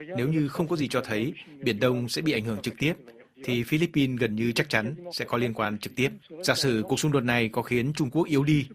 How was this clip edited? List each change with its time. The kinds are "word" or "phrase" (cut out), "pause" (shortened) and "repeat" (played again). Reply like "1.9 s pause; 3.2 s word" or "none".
none